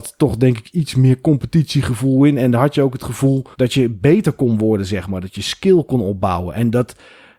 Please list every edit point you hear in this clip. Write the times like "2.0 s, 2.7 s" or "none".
3.5 s